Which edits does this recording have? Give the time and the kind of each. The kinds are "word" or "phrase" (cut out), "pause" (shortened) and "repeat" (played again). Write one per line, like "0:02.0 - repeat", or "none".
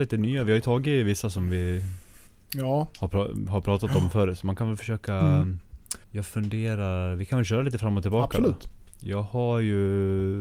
0:02.3 - pause
0:06.0 - pause